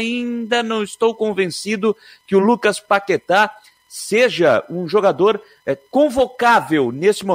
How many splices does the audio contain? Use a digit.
0